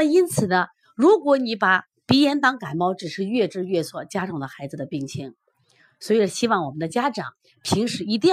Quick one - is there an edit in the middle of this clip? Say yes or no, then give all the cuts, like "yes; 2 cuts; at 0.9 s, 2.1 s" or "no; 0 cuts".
no; 0 cuts